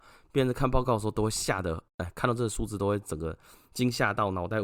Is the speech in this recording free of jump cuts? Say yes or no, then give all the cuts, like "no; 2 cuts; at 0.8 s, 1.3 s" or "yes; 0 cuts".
yes; 0 cuts